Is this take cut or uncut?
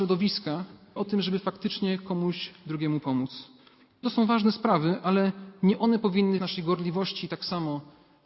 cut